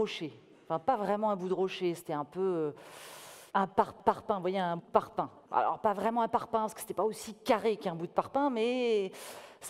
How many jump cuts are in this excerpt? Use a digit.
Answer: 4